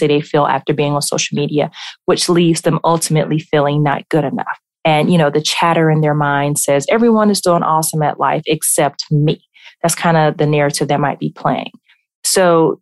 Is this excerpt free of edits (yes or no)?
yes